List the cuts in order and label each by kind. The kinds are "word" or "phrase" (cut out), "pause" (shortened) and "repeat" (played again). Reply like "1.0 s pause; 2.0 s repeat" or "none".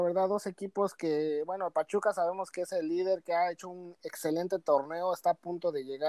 none